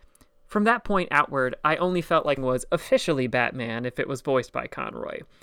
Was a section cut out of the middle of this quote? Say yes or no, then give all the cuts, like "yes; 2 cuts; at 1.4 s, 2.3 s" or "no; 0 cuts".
yes; 1 cut; at 2.4 s